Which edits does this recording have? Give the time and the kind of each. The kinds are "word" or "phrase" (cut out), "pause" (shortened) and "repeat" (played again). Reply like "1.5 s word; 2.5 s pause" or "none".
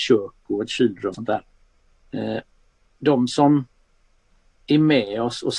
1.1 s word